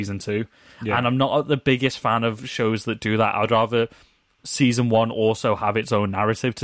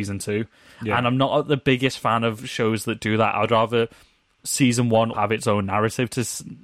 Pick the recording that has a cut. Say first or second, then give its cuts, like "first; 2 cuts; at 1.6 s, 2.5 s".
second; 1 cut; at 5.1 s